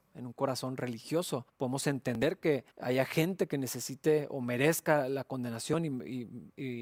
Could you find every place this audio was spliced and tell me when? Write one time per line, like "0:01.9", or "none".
0:01.5
0:02.7